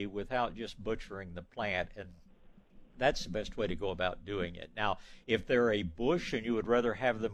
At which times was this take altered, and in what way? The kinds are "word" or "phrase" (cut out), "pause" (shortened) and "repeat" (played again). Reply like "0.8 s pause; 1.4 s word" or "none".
2.9 s pause